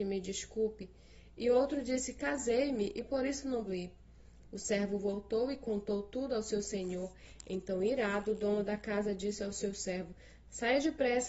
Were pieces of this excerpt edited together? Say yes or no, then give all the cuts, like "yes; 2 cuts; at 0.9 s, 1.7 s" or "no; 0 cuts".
yes; 1 cut; at 3.7 s